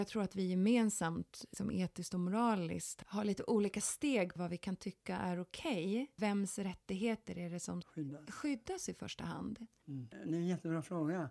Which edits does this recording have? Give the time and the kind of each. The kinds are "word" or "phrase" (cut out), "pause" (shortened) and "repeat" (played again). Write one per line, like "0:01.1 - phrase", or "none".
none